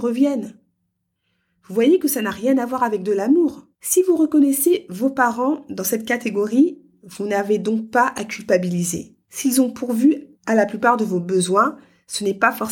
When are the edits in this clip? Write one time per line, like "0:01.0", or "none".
0:03.7
0:09.2
0:10.3